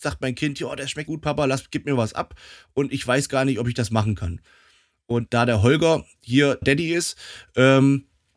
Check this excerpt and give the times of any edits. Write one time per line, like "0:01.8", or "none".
0:01.1
0:05.3
0:06.6